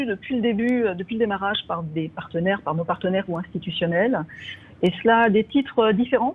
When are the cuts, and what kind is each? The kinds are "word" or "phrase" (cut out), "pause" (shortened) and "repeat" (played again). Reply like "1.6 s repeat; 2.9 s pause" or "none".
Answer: 3.3 s word